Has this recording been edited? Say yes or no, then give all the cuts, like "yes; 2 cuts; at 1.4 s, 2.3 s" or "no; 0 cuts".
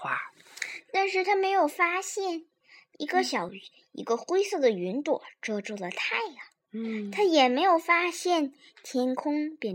no; 0 cuts